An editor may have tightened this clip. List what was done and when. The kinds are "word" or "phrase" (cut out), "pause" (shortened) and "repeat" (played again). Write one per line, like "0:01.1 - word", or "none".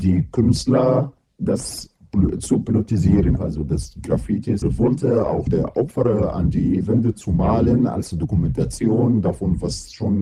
0:01.2 - pause
0:03.4 - word
0:04.6 - phrase
0:05.5 - word